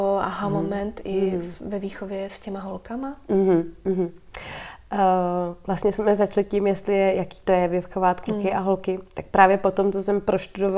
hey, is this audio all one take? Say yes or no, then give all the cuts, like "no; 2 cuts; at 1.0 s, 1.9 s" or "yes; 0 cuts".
yes; 0 cuts